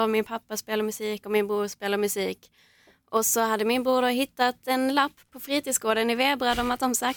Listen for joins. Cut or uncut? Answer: uncut